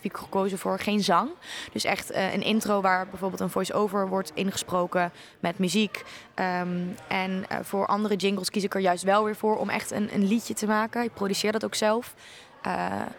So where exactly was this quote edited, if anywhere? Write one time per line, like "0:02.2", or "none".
0:10.1